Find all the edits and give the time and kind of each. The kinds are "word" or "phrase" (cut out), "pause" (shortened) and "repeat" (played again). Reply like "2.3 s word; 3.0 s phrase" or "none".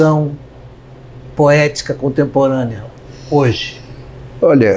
none